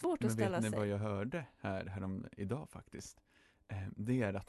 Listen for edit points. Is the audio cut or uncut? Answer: uncut